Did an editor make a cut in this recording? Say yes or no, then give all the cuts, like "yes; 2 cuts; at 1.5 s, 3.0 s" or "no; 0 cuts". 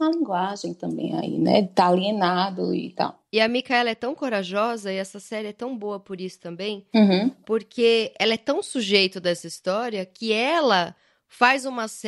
no; 0 cuts